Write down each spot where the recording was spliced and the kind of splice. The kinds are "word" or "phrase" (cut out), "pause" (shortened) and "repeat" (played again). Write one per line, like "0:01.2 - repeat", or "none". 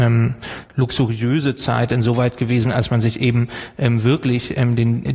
none